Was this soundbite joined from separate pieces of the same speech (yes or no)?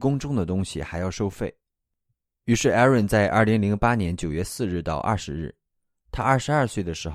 no